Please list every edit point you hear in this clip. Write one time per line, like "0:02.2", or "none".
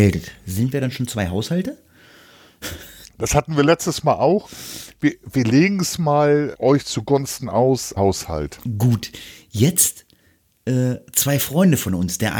0:03.0
0:06.5
0:08.0